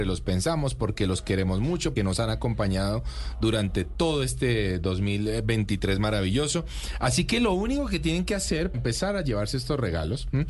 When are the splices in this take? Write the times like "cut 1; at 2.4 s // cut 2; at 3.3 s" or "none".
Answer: cut 1; at 2.0 s // cut 2; at 8.7 s